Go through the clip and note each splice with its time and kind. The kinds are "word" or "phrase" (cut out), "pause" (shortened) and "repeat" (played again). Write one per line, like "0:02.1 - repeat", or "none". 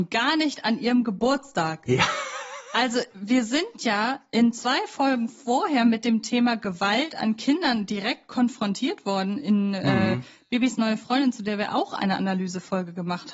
none